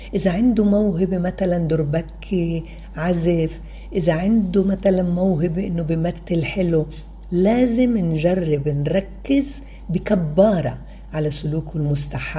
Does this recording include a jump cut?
no; 0 cuts

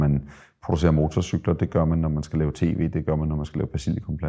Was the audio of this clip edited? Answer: no; 0 cuts

